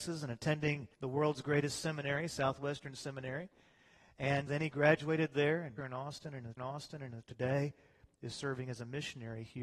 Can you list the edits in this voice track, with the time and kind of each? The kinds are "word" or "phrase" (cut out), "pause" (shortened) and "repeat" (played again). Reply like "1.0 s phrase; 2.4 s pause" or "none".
0.9 s pause; 4.5 s word; 5.8 s phrase; 6.6 s repeat

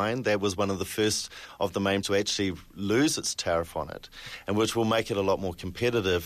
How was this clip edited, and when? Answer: 2.0 s word

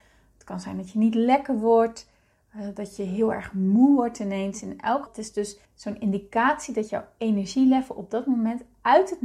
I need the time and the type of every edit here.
5.1 s word; 5.6 s pause

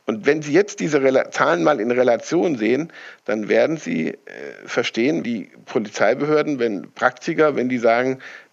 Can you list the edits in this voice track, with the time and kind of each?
5.2 s word

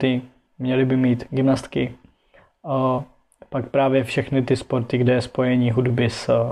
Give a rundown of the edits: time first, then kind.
none

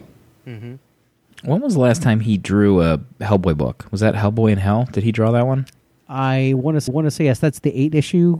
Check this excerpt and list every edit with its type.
6.9 s repeat

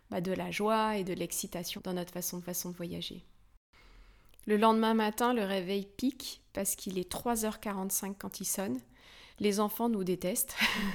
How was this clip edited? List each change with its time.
1.8 s word; 2.4 s repeat; 6.5 s pause; 9.3 s pause

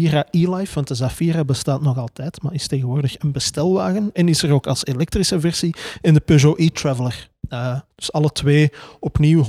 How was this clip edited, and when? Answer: 7.9 s pause

